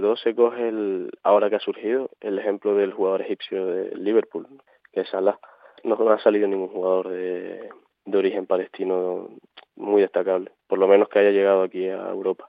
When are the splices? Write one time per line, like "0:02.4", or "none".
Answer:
none